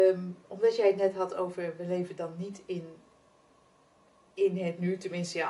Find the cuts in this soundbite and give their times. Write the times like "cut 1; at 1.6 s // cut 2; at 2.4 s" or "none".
none